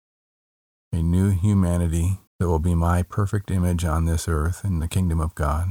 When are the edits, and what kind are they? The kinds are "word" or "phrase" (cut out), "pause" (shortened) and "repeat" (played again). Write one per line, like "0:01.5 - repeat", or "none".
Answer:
0:02.3 - pause